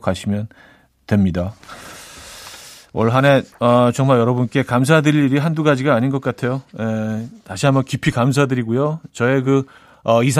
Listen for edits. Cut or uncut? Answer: uncut